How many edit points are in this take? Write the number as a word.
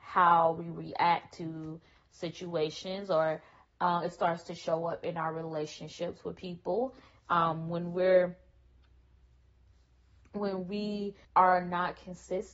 one